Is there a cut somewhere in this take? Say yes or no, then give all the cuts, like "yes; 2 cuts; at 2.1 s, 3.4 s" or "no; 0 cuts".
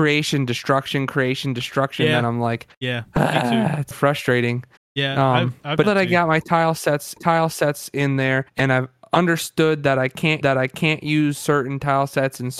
yes; 7 cuts; at 2.7 s, 3.9 s, 4.8 s, 5.8 s, 7.2 s, 8.5 s, 10.4 s